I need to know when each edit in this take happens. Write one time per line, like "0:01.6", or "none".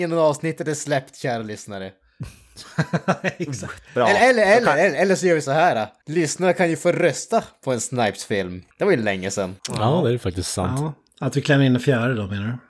0:06.0
0:08.7
0:09.6